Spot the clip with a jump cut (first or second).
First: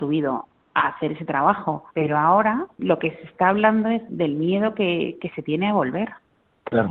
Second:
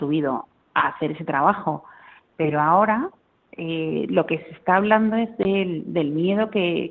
first